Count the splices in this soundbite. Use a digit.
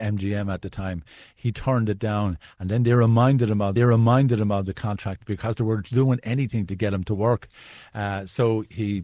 1